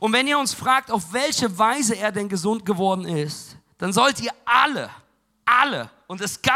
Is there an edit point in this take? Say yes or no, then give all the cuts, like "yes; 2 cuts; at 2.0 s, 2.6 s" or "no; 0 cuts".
no; 0 cuts